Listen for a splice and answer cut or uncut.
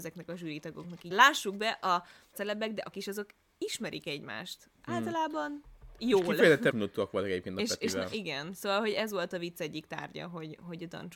cut